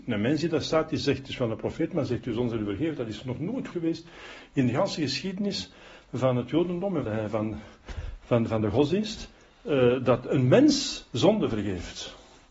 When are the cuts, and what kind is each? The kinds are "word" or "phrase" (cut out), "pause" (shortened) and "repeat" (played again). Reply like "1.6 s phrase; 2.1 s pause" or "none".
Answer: 3.7 s word; 7.0 s word